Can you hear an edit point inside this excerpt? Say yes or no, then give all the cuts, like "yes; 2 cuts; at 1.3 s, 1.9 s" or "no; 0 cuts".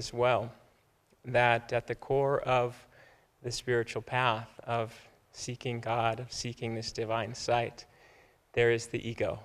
no; 0 cuts